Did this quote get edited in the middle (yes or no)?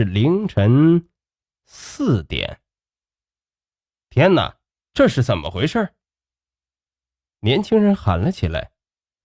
no